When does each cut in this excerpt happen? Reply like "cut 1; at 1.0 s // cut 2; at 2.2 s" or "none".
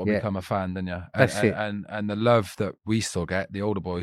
cut 1; at 2.8 s